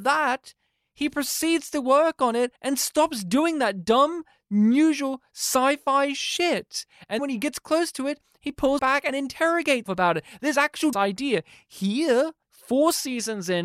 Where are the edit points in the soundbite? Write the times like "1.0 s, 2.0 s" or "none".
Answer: 2.6 s, 7.2 s, 8.8 s, 9.9 s, 10.9 s, 12.4 s